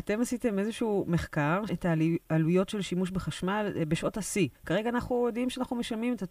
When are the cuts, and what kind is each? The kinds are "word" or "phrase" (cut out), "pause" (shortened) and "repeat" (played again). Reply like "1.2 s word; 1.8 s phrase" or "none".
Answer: 1.7 s word; 4.6 s pause

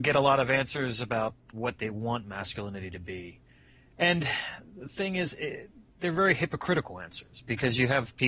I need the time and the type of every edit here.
none

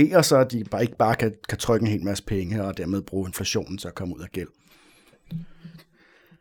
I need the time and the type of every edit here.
none

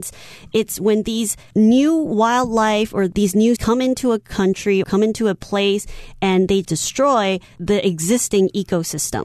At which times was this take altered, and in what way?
3.6 s word; 4.8 s word; 6.6 s word

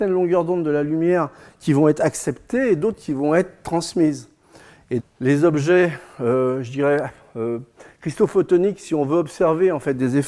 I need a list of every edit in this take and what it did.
5.0 s phrase

